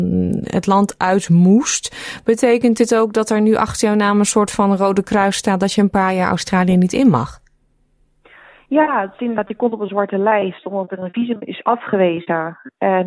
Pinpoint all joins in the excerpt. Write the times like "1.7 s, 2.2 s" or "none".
none